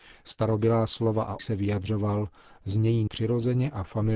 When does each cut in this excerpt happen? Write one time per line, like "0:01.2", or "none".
0:01.4
0:03.1